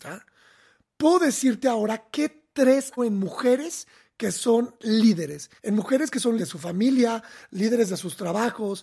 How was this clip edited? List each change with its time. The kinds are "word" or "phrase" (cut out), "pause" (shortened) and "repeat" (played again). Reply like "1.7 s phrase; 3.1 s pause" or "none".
3.0 s phrase; 5.6 s pause; 6.4 s word